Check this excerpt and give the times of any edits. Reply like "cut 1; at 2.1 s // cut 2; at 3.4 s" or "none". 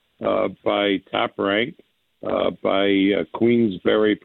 none